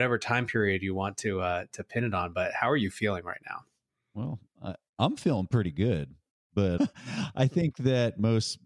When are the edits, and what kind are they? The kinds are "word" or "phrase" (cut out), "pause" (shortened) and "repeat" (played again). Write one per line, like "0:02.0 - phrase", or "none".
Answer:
0:06.8 - word